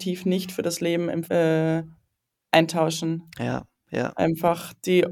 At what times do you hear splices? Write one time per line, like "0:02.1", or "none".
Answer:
0:01.2